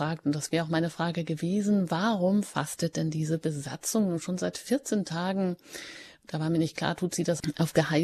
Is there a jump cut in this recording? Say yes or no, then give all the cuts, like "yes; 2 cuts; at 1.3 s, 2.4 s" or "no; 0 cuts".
no; 0 cuts